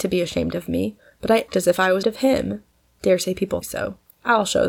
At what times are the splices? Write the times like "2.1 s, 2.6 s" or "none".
1.5 s, 2.0 s, 3.6 s